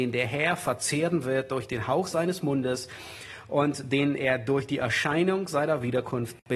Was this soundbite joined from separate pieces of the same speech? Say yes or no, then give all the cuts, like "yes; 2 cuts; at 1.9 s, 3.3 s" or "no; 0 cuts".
no; 0 cuts